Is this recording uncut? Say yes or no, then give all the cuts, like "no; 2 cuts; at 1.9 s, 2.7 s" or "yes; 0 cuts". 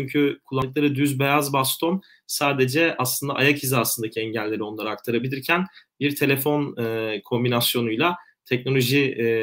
yes; 0 cuts